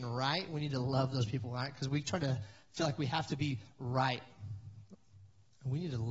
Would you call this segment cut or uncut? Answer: uncut